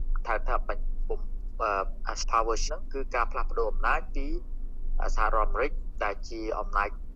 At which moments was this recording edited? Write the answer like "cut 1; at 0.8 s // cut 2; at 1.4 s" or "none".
cut 1; at 2.2 s // cut 2; at 2.7 s